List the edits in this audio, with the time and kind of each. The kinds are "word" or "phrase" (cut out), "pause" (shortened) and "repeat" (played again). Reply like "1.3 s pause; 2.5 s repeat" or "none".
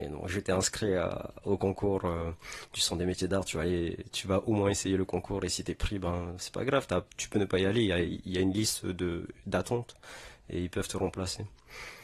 none